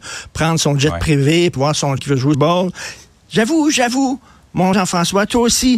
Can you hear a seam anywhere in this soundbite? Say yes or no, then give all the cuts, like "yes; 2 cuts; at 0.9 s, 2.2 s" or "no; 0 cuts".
yes; 4 cuts; at 1.6 s, 2.0 s, 2.3 s, 4.7 s